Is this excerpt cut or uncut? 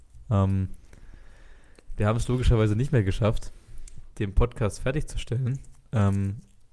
cut